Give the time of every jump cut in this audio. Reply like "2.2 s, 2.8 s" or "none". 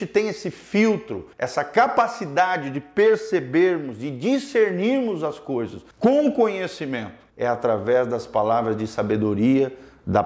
1.3 s, 5.9 s, 7.3 s